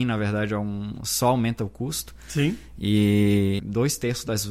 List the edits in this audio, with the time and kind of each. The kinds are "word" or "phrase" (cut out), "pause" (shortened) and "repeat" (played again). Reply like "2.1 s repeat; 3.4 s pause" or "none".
3.6 s word

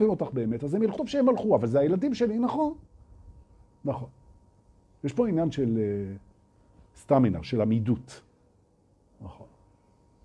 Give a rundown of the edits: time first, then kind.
1.0 s word

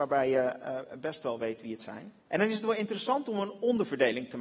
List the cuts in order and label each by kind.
2.2 s pause

